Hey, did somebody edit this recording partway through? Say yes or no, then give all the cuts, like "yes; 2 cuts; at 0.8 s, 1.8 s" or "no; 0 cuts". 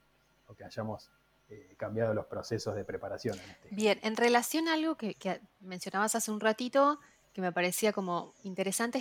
no; 0 cuts